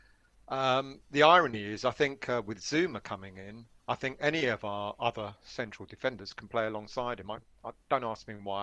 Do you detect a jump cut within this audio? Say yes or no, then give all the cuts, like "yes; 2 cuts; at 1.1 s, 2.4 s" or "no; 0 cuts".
yes; 1 cut; at 3.8 s